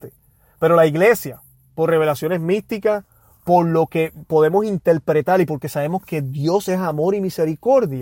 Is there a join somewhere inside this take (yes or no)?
no